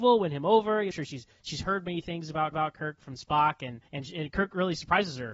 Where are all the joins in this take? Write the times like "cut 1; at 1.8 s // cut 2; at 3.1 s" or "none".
cut 1; at 0.9 s // cut 2; at 2.5 s // cut 3; at 3.9 s